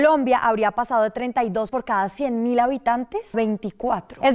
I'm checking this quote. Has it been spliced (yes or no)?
yes